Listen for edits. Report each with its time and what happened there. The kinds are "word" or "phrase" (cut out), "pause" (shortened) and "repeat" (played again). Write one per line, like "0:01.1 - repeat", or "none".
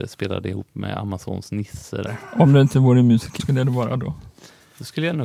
0:03.4 - word